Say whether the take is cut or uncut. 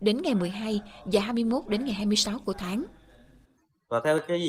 uncut